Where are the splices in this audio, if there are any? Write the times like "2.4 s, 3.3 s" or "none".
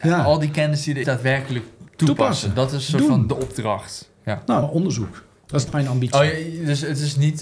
1.0 s, 4.6 s, 5.7 s